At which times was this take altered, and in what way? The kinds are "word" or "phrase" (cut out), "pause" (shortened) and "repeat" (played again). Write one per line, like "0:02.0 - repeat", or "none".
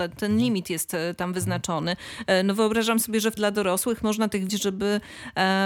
0:03.4 - word
0:04.5 - phrase

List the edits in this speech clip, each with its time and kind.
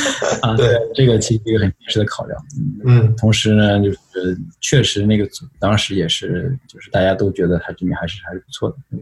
0:05.5 - pause

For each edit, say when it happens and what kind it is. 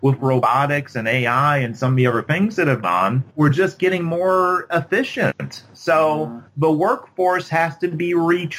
0:02.8 - word
0:03.3 - pause
0:06.5 - pause

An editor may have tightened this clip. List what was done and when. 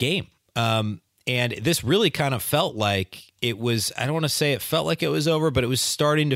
none

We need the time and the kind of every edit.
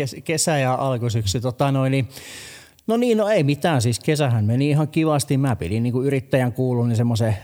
none

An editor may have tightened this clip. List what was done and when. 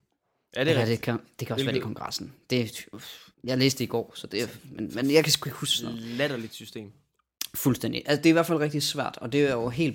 0:03.3 - pause

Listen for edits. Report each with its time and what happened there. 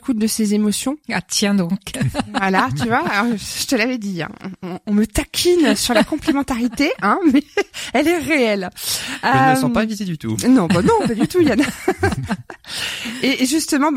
none

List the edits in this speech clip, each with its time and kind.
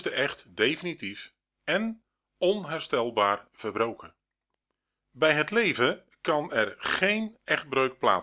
none

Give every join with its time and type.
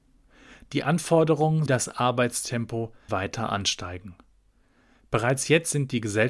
0:01.7 - word
0:03.1 - word

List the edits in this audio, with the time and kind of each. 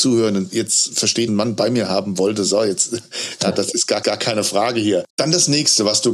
0:01.3 - phrase
0:04.0 - repeat
0:05.1 - pause

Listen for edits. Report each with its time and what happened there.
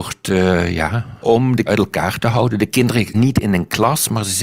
0:01.2 - word
0:01.7 - word
0:03.1 - word

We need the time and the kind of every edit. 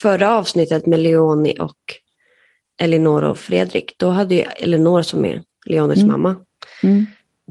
none

